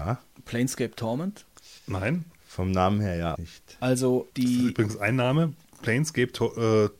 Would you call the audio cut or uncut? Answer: cut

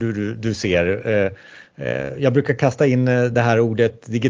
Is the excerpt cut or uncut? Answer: uncut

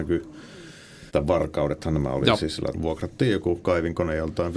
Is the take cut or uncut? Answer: cut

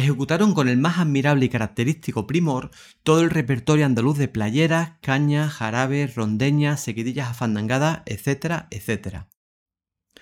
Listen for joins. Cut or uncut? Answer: uncut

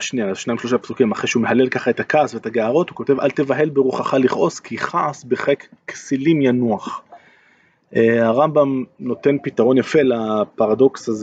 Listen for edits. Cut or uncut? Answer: uncut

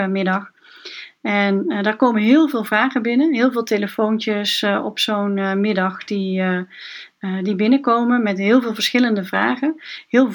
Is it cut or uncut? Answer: uncut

